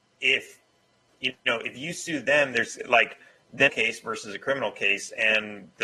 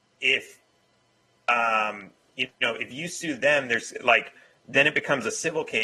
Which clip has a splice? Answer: first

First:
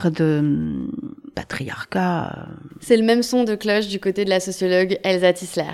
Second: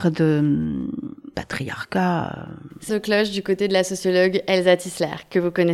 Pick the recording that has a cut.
second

